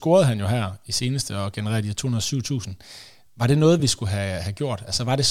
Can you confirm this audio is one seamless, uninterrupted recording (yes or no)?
yes